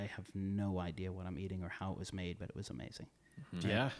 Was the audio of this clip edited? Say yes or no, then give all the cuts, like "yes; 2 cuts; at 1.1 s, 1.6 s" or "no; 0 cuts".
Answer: no; 0 cuts